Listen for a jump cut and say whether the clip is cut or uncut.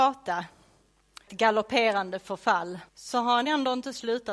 cut